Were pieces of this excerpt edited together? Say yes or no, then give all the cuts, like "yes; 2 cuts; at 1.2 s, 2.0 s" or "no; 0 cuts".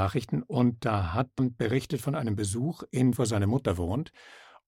yes; 2 cuts; at 1.4 s, 3.2 s